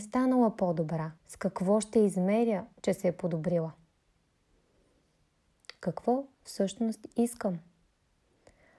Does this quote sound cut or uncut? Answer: cut